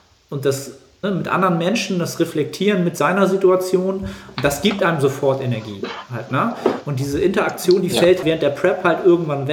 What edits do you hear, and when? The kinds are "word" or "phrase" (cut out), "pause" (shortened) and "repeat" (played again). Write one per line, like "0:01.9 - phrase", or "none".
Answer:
0:01.0 - word
0:08.2 - word

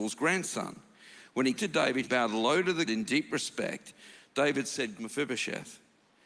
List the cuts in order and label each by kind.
0:01.6 - word
0:02.0 - word
0:02.9 - word
0:05.0 - word

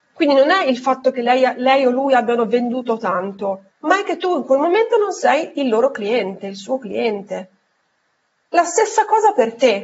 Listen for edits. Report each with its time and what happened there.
0:03.7 - pause

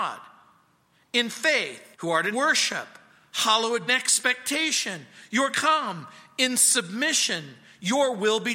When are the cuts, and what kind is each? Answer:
0:01.9 - pause
0:02.3 - phrase
0:03.9 - phrase
0:05.5 - word

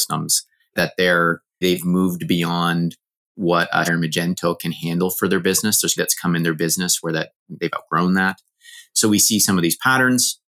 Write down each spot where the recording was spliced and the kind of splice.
0:01.6 - word
0:03.9 - word
0:06.0 - word

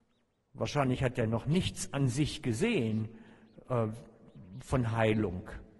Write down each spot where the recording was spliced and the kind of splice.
none

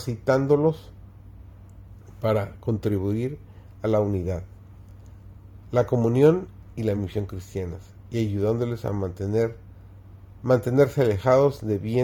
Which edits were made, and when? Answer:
none

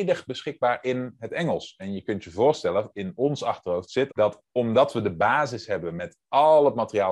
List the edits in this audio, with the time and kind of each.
0:04.1 - word

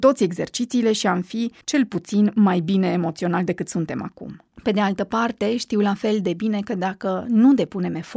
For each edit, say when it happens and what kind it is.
0:01.6 - pause

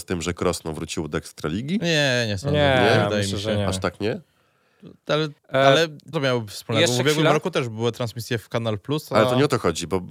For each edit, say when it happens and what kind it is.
0:05.4 - pause
0:06.1 - word

